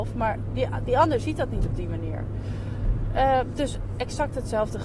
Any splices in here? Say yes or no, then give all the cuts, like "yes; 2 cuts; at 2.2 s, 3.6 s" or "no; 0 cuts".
no; 0 cuts